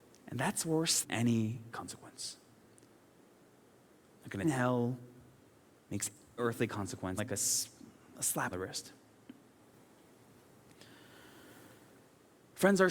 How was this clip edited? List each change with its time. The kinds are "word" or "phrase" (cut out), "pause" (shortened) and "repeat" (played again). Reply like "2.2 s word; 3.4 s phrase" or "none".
1.0 s word; 1.7 s word; 4.4 s word; 6.4 s word; 7.2 s word; 8.5 s word